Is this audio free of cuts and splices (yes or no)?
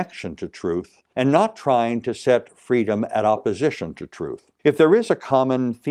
no